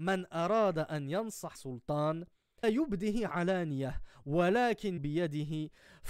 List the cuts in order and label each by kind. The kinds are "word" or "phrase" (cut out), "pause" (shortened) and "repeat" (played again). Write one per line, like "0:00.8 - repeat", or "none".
0:01.5 - word
0:02.6 - word
0:05.0 - word